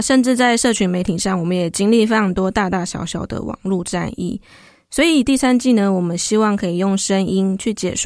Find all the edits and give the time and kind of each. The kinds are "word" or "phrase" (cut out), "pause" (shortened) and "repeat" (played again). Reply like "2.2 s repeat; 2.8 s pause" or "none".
none

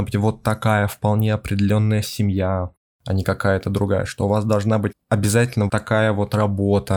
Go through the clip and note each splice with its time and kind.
4.9 s word; 5.7 s word

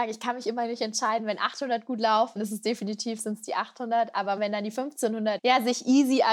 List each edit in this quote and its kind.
2.4 s word; 4.4 s word; 5.4 s word

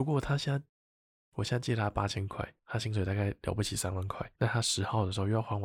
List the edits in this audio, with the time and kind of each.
2.6 s pause; 4.4 s pause

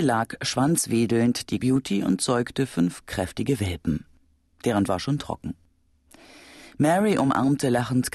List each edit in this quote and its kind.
1.6 s word; 4.9 s word

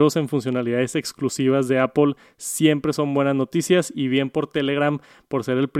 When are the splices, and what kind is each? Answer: none

